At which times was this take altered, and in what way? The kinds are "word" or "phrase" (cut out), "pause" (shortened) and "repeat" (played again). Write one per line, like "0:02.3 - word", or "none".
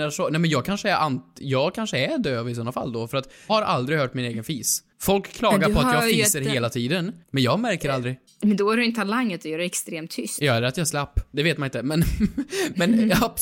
0:03.5 - word
0:04.9 - pause
0:07.2 - pause
0:08.3 - pause